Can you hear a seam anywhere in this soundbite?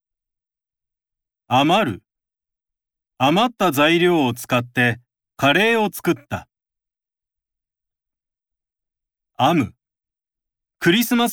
no; 0 cuts

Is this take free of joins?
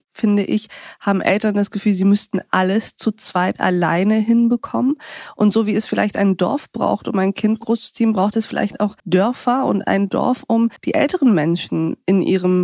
no; 2 cuts; at 9.0 s, 10.8 s

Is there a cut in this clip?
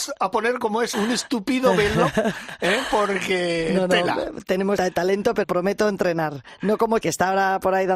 yes; 4 cuts; at 0.9 s, 4.8 s, 5.4 s, 7.0 s

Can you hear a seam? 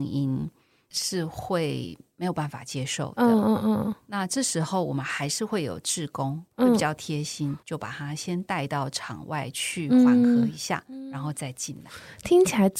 yes; 2 cuts; at 6.5 s, 7.6 s

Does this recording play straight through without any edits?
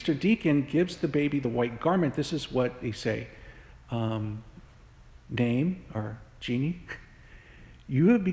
yes; 0 cuts

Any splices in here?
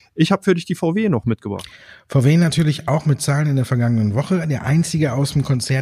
no; 0 cuts

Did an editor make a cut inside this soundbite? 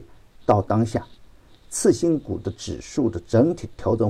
no; 0 cuts

